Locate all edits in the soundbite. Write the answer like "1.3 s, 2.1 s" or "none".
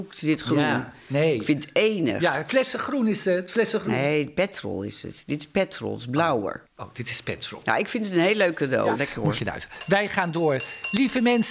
6.7 s